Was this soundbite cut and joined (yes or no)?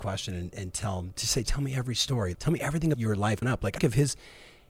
yes